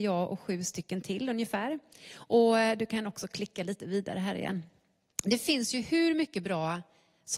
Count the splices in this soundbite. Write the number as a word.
zero